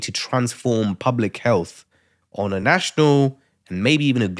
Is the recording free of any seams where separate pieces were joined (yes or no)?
yes